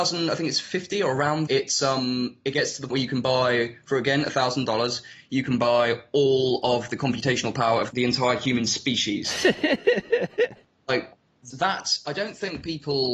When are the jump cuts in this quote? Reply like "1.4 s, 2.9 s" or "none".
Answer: 1.5 s, 2.9 s, 11.5 s